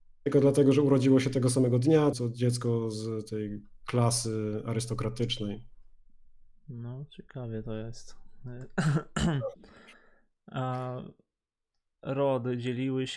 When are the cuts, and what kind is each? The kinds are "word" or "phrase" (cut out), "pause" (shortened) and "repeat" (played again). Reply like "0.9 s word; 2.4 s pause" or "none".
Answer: 2.1 s word